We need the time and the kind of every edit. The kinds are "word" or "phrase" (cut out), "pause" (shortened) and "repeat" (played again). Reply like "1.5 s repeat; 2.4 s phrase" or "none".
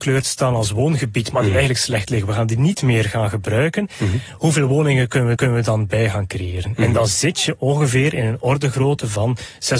5.4 s repeat